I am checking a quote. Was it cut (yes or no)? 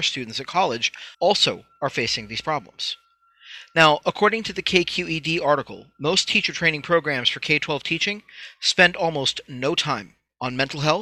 yes